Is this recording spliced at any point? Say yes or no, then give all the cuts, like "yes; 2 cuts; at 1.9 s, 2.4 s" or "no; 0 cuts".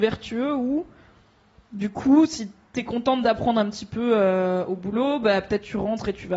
no; 0 cuts